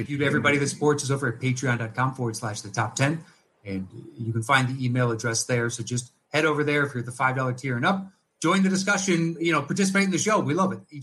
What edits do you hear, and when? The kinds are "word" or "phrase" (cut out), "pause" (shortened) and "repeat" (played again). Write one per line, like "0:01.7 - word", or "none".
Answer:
none